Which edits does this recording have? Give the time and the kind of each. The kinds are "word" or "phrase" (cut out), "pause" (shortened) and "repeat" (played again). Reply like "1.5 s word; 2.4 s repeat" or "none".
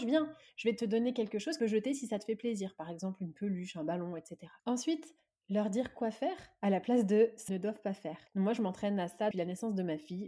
1.6 s phrase; 4.6 s pause; 7.5 s word; 8.3 s pause; 9.3 s word